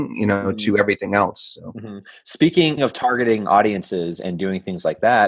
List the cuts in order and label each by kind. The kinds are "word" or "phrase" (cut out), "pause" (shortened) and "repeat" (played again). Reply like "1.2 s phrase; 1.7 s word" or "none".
2.8 s word